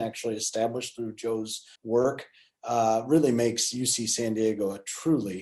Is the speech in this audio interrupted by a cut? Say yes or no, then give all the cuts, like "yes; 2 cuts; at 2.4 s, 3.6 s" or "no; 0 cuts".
yes; 1 cut; at 1.7 s